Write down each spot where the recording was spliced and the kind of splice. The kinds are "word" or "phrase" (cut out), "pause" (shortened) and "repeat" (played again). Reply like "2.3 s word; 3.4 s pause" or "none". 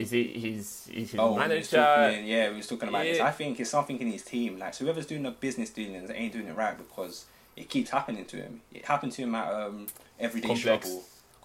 none